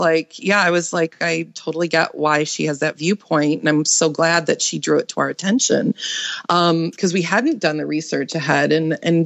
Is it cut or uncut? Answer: uncut